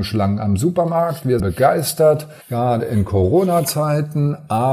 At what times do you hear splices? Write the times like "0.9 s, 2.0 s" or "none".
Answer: 1.4 s, 2.4 s